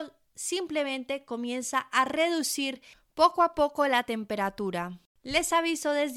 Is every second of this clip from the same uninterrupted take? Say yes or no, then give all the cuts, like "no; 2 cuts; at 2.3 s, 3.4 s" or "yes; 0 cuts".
yes; 0 cuts